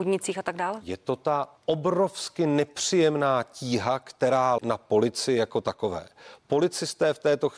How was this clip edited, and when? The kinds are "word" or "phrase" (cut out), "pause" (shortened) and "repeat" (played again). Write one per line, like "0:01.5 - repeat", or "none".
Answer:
0:01.6 - pause
0:04.6 - word